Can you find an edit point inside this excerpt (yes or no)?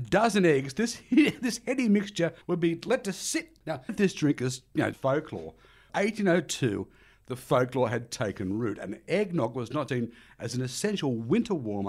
yes